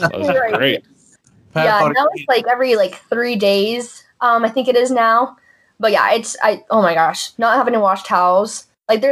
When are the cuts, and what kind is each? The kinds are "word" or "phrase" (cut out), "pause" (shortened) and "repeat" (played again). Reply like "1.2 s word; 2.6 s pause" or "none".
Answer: none